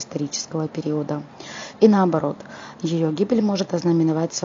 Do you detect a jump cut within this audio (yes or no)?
no